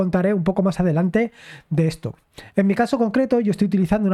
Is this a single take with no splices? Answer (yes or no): yes